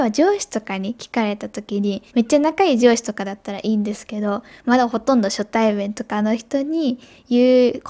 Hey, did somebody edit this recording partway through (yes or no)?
yes